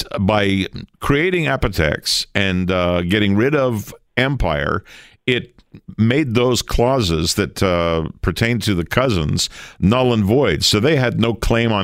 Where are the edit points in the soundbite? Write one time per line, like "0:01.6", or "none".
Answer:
0:00.9